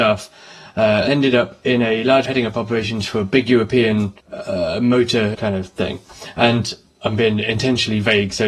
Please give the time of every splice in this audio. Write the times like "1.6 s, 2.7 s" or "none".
1.1 s, 2.3 s, 4.2 s, 5.3 s